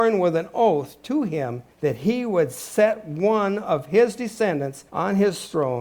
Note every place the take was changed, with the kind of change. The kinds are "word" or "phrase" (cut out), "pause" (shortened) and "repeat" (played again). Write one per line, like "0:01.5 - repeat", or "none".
0:01.7 - pause
0:04.9 - pause